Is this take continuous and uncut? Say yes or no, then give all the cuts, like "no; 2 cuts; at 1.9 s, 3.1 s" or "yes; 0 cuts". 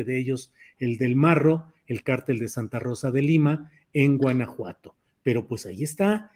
yes; 0 cuts